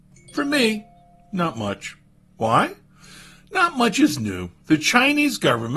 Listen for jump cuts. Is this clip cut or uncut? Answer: uncut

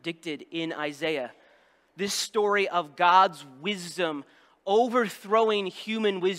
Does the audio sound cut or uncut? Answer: uncut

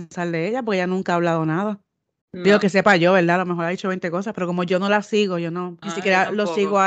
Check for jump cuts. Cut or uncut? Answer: cut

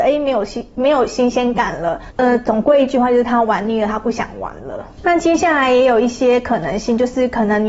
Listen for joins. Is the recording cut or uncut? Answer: uncut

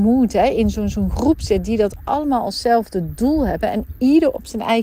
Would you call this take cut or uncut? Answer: uncut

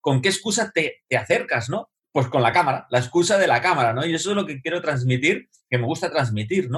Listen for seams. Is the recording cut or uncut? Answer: uncut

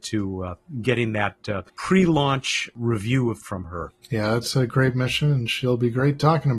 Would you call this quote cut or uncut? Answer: cut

